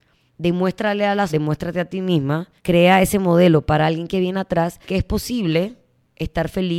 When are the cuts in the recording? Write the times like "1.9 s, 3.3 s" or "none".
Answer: 1.3 s, 2.6 s, 4.8 s